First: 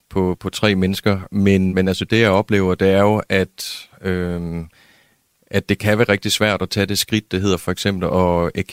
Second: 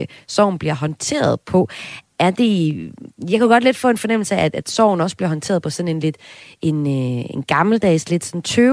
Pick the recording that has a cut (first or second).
first